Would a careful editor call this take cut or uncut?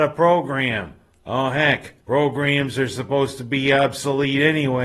cut